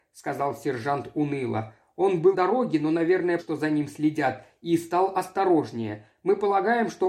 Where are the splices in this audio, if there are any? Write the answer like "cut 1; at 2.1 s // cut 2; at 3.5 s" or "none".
cut 1; at 2.3 s // cut 2; at 3.4 s